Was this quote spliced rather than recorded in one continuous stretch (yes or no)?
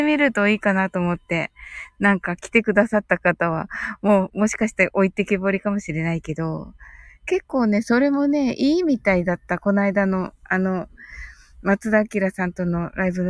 no